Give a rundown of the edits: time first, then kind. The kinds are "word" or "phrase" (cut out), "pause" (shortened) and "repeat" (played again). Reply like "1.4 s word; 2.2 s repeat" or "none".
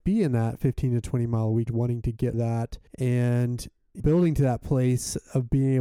1.7 s word; 2.3 s word; 2.9 s pause; 4.0 s word